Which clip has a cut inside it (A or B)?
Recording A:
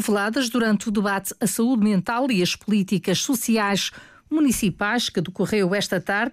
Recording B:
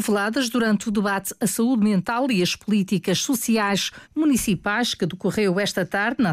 B